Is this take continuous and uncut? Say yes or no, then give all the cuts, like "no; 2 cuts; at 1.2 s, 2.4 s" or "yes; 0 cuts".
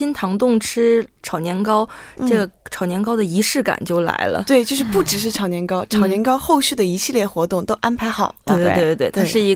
yes; 0 cuts